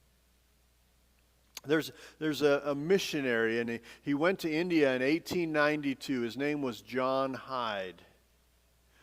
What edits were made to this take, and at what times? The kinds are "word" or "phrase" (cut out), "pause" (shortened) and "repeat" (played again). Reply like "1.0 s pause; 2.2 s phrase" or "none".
none